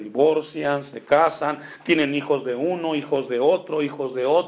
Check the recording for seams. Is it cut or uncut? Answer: uncut